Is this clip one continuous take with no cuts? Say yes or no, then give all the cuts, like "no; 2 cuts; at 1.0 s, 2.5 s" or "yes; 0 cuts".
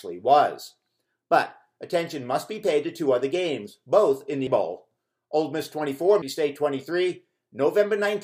no; 2 cuts; at 4.5 s, 6.2 s